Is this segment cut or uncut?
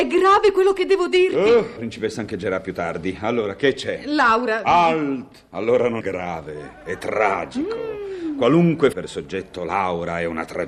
cut